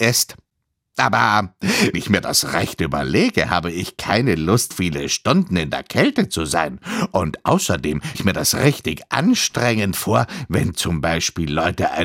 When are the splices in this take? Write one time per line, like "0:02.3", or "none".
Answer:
0:01.9
0:04.7
0:08.1